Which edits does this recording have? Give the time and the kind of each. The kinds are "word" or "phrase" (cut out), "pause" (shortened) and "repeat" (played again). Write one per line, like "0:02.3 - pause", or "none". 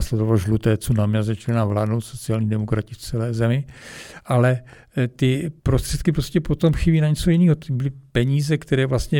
0:05.6 - pause